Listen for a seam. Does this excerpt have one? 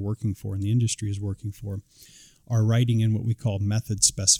no; 0 cuts

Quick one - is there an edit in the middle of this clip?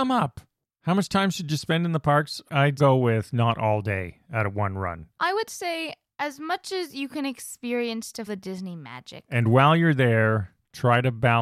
yes; 2 cuts; at 2.8 s, 8.3 s

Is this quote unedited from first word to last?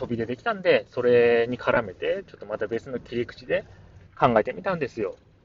no; 1 cut; at 4.1 s

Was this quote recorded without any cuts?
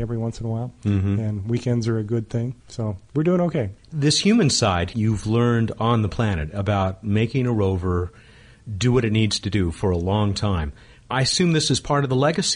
no; 2 cuts; at 2.6 s, 4.9 s

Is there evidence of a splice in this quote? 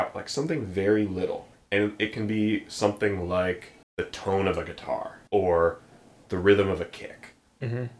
yes; 3 cuts; at 1.5 s, 3.8 s, 5.3 s

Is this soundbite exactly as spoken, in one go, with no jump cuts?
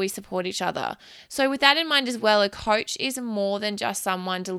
yes; 0 cuts

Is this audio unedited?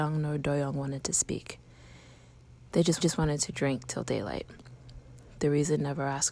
no; 1 cut; at 3.0 s

